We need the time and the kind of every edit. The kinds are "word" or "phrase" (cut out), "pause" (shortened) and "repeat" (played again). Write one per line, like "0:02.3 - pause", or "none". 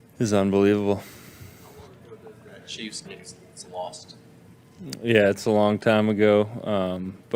0:03.0 - phrase
0:03.6 - phrase